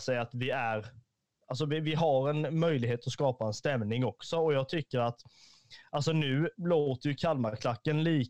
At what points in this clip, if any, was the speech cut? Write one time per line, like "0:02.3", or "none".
none